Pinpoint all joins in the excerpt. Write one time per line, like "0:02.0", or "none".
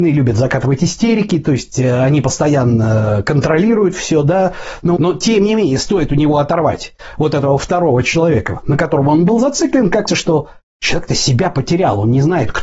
0:05.0
0:10.1